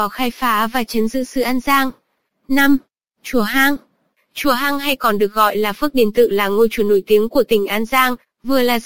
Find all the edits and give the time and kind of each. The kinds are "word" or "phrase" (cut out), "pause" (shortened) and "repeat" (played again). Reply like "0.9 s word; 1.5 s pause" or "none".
none